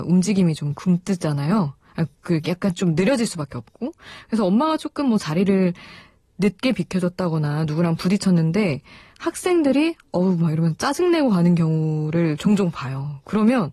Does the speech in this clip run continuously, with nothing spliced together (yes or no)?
yes